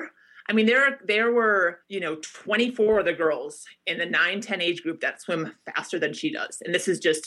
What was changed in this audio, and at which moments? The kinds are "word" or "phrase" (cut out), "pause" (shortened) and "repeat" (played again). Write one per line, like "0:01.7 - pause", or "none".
0:01.8 - pause

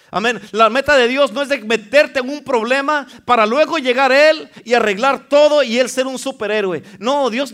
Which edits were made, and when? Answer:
none

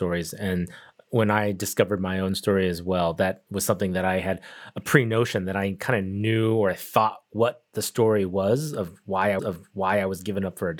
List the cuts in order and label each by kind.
0:03.5 - pause
0:09.4 - repeat

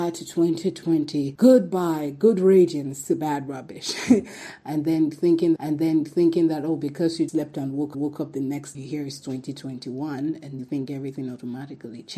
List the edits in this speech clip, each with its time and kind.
0:05.6 - repeat
0:07.3 - word
0:07.9 - repeat
0:08.7 - phrase
0:10.6 - word

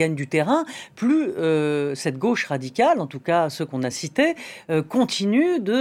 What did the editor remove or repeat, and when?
none

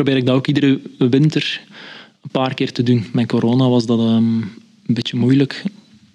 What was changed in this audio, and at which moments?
none

